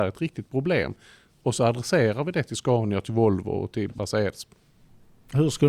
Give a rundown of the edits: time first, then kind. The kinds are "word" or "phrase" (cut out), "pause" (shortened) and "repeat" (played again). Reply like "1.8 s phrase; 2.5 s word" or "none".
none